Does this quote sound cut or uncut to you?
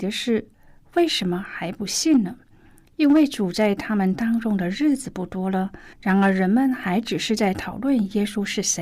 cut